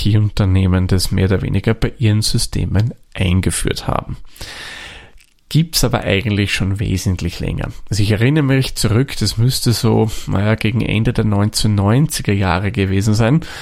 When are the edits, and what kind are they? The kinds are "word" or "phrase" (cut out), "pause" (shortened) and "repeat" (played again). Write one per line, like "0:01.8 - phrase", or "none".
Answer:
none